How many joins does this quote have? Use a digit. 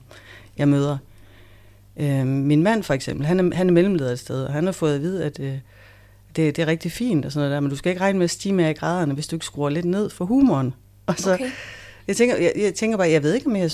0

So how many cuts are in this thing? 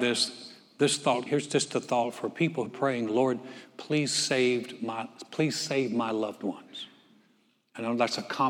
2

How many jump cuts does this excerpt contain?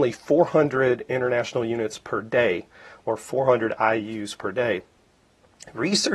0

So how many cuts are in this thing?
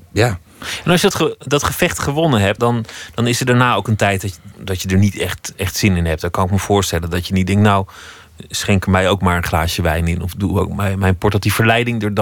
3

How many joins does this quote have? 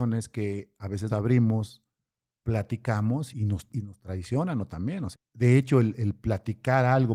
5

